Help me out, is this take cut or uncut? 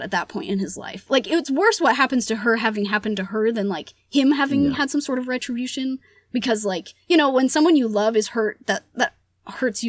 uncut